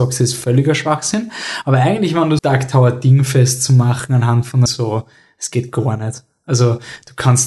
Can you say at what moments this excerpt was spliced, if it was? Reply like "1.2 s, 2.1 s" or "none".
2.4 s, 4.7 s

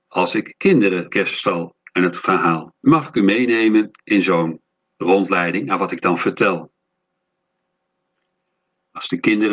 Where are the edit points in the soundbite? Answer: 1.1 s, 2.8 s, 4.0 s

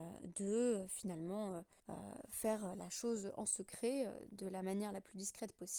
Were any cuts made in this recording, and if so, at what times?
1.8 s

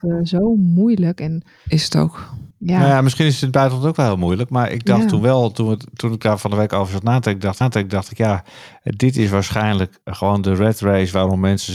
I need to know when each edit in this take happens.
2.5 s, 7.6 s, 10.0 s

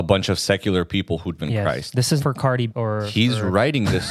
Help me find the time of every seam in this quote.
1.4 s, 2.2 s, 2.7 s

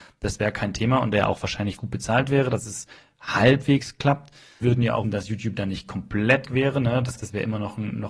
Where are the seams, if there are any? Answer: 1.8 s, 4.6 s, 5.0 s, 6.4 s, 7.1 s

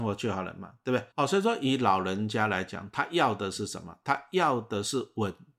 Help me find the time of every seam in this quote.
1.1 s

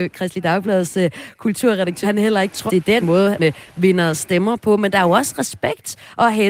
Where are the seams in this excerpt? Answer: 2.0 s, 2.7 s, 3.0 s, 3.4 s

